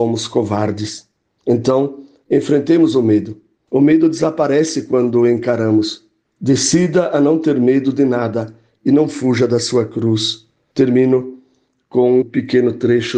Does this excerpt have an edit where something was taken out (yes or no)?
yes